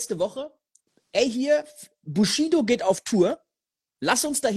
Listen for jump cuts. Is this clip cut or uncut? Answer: uncut